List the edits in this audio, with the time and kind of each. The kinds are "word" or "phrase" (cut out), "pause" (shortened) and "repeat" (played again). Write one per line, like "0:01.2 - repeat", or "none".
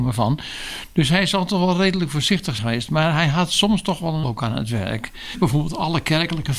0:02.6 - word
0:04.2 - word

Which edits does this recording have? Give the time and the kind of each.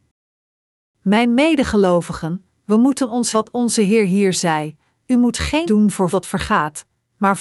0:03.3 - word
0:05.7 - word
0:06.1 - word

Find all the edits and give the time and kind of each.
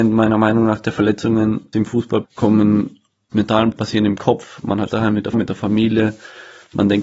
0:01.7 - word
0:02.2 - word
0:03.3 - word
0:03.7 - word
0:04.9 - word
0:05.3 - word

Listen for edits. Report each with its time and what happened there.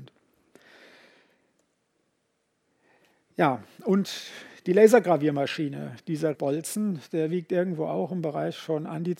0:06.3 - word

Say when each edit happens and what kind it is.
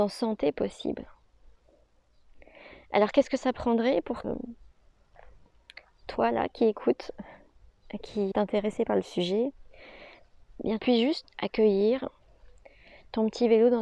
0:04.2 - word
0:08.3 - word
0:10.8 - word
0:11.2 - word

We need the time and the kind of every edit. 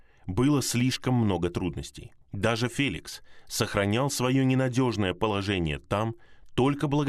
0:02.2 - pause

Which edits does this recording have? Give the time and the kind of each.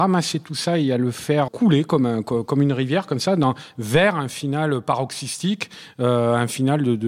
0:01.5 - word

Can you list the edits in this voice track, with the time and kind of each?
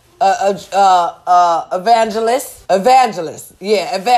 0:02.6 - pause

